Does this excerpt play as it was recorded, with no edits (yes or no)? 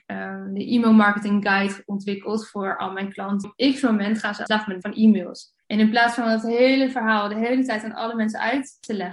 no